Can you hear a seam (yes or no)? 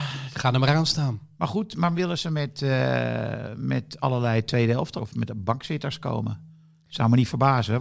yes